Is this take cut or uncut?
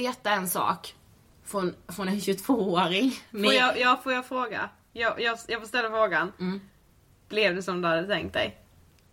uncut